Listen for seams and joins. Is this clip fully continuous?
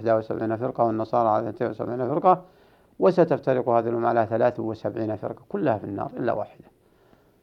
yes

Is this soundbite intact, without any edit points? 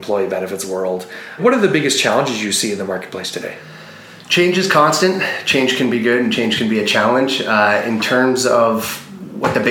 yes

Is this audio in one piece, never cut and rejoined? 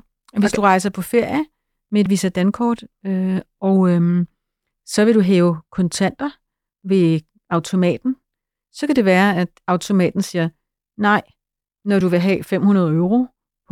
yes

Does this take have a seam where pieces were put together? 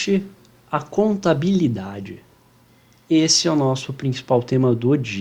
no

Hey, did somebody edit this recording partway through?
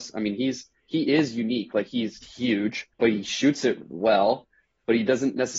yes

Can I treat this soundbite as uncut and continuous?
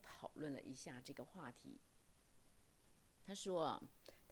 no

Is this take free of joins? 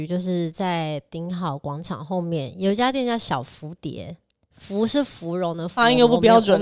yes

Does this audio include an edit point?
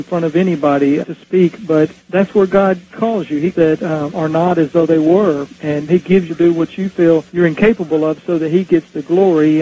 yes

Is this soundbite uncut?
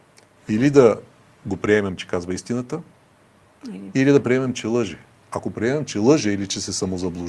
yes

